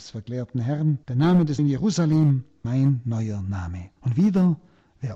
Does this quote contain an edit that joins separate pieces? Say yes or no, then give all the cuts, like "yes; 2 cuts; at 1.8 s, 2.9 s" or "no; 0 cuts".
yes; 4 cuts; at 1.0 s, 1.6 s, 2.6 s, 4.0 s